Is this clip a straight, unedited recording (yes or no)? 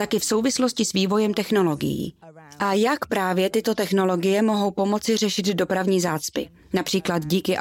yes